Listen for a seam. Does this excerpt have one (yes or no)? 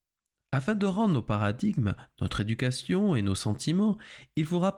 no